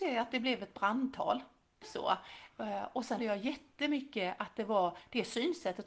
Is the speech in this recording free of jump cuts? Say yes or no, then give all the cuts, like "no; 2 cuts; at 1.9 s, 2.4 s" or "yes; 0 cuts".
no; 2 cuts; at 1.8 s, 3.2 s